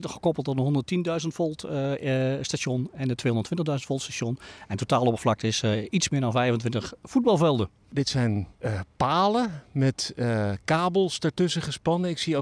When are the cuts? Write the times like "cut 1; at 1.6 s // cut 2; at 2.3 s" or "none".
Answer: cut 1; at 8.5 s